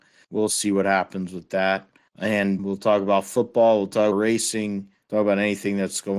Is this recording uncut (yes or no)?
no